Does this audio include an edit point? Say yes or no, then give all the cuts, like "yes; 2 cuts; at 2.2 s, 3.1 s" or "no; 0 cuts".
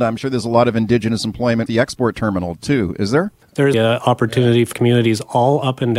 yes; 4 cuts; at 1.7 s, 3.4 s, 3.7 s, 4.7 s